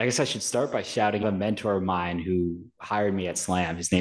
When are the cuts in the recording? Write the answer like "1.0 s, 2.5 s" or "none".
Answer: 1.2 s